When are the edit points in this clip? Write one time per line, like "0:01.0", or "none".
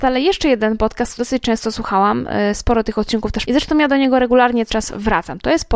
0:01.2
0:03.4
0:04.7